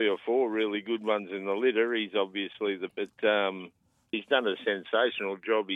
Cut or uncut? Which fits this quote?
cut